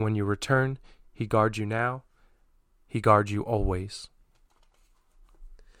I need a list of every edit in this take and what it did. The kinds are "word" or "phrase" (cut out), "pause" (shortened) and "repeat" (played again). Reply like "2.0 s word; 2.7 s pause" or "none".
none